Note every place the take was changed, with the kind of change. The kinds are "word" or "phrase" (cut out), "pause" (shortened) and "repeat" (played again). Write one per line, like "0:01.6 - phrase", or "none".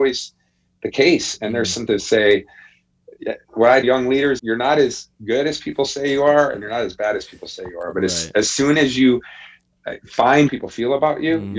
0:01.9 - phrase
0:03.8 - word
0:04.4 - word
0:10.5 - phrase